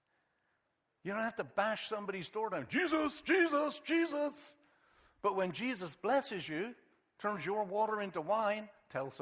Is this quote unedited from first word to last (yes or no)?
yes